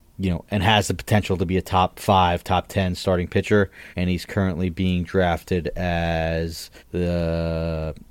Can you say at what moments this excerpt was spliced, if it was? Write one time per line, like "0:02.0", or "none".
0:03.9
0:06.8